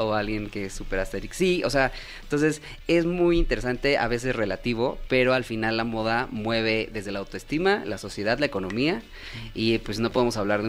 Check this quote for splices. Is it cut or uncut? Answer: uncut